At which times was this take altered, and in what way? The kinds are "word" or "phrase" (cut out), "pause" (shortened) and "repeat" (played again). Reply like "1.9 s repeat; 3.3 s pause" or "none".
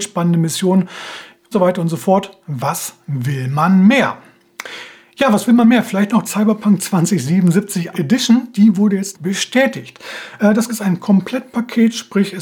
1.5 s word; 6.3 s word; 7.9 s word; 9.1 s word; 10.7 s word